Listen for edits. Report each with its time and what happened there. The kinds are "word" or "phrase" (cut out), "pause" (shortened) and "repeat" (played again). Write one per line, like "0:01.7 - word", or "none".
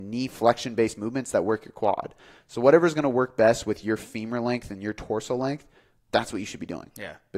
none